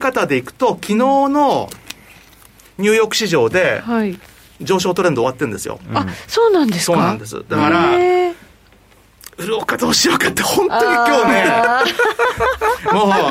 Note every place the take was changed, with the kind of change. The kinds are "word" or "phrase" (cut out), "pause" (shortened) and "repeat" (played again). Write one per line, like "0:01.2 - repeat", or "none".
none